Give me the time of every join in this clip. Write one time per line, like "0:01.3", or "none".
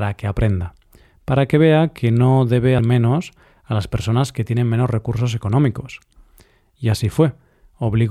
0:02.8